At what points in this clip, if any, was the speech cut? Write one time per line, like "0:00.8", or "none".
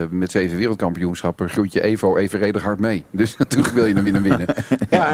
0:04.1